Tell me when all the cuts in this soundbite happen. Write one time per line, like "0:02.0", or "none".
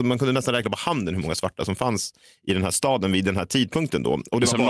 none